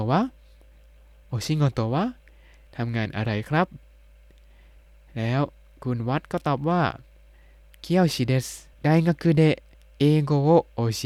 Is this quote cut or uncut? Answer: cut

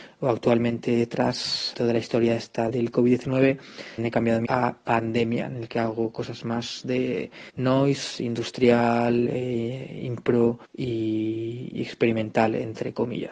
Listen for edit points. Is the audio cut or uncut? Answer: cut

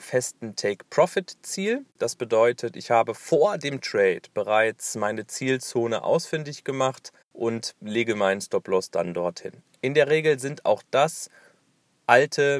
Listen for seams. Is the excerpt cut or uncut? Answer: cut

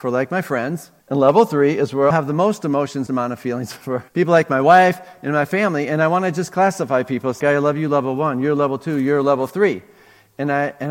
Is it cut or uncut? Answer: cut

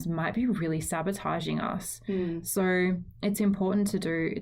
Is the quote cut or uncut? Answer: uncut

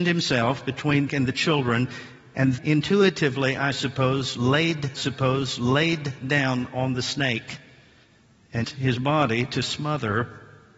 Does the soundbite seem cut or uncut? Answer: cut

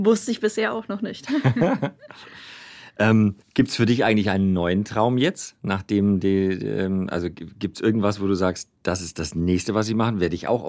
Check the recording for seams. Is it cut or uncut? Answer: cut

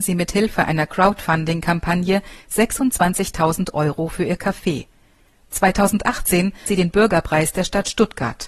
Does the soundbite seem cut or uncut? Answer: cut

